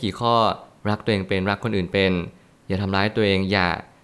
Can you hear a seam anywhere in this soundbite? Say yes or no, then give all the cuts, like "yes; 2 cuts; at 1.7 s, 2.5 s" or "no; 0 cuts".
no; 0 cuts